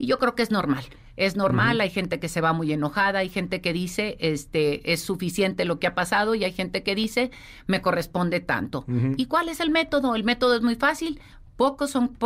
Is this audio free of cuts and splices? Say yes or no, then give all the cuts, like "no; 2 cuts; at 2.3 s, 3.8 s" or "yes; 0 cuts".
yes; 0 cuts